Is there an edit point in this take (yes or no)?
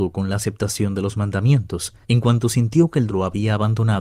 yes